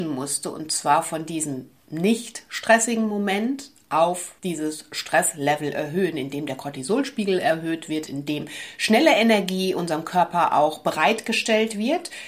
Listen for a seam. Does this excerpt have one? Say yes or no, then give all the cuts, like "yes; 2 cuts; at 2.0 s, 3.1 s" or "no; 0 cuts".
yes; 2 cuts; at 1.8 s, 4.4 s